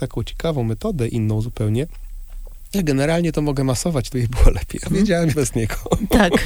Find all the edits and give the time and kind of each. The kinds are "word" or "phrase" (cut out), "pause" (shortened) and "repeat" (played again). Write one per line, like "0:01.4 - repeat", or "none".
0:02.7 - word
0:04.1 - phrase
0:04.9 - word
0:05.3 - word